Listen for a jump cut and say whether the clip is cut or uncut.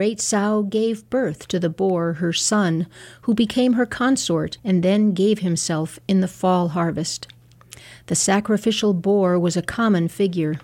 cut